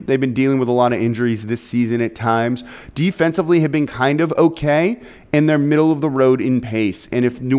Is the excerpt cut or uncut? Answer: uncut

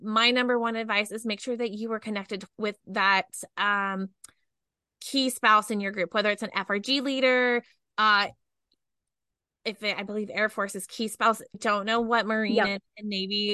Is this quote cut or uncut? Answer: cut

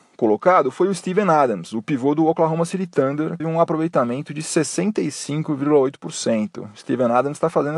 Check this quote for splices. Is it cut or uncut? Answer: cut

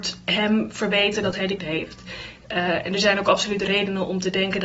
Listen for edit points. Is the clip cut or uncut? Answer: cut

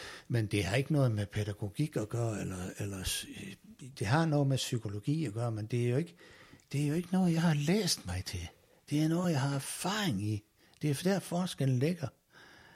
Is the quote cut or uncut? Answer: uncut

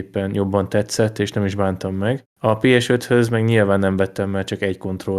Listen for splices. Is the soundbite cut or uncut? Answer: cut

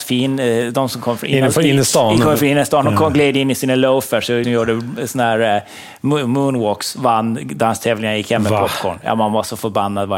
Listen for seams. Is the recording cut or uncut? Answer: cut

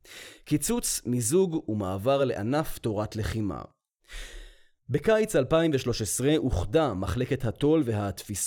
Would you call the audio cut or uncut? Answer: uncut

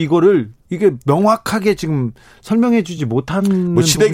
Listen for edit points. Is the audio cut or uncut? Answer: uncut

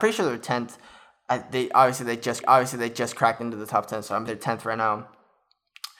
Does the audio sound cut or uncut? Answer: cut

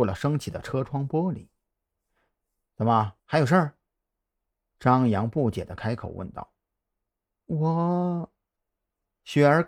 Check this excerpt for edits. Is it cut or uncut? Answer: cut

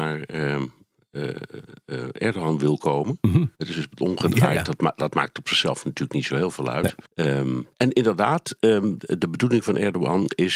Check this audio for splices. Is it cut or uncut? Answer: cut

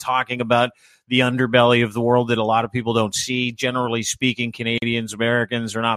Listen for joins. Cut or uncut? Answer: uncut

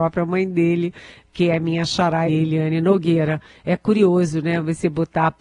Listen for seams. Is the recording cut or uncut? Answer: cut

